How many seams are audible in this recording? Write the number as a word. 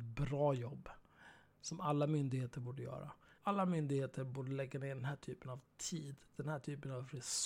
one